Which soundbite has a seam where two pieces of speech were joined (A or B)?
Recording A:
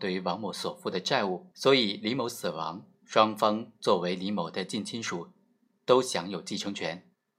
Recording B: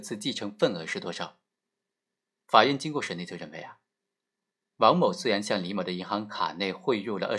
A